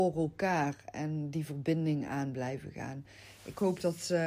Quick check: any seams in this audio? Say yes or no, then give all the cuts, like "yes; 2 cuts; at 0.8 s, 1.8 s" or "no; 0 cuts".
no; 0 cuts